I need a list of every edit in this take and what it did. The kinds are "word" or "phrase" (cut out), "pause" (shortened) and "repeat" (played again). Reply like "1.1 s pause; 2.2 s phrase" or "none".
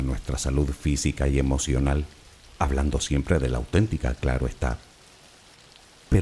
none